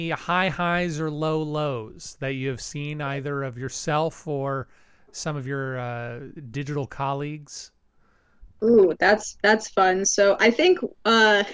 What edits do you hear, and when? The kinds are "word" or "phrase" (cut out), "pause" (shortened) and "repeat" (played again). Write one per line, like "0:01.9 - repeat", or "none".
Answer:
none